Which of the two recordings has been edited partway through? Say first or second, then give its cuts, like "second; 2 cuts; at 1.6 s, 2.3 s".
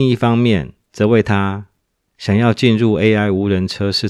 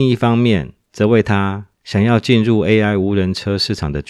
second; 1 cut; at 1.7 s